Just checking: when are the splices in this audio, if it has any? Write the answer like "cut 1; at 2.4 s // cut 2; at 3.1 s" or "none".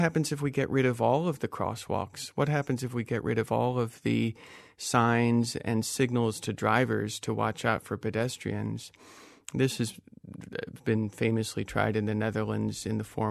none